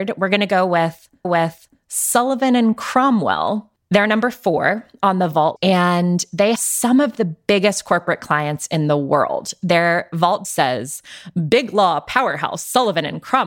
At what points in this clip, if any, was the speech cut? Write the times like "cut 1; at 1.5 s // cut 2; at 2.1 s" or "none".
cut 1; at 1.2 s // cut 2; at 5.6 s // cut 3; at 6.6 s // cut 4; at 10.4 s